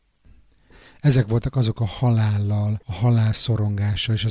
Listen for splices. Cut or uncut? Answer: cut